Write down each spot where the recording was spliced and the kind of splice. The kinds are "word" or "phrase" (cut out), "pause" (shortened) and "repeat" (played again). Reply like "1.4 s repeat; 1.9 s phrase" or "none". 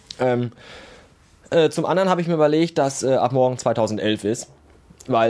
none